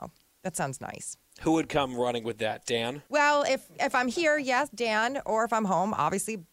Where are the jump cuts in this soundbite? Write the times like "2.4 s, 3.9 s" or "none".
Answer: 3.1 s